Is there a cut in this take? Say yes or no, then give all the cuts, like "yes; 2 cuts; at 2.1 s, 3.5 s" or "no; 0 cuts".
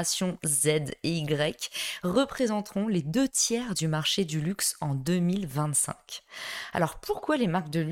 no; 0 cuts